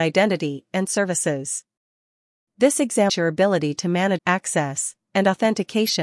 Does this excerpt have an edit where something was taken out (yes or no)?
yes